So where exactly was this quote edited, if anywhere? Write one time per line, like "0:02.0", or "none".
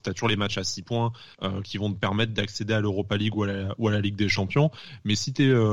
0:01.3